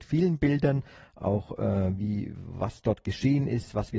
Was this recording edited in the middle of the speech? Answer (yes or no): no